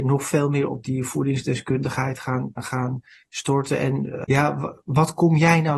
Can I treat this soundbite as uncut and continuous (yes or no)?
no